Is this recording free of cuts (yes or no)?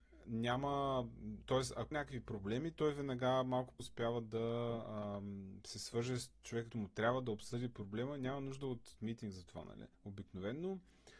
no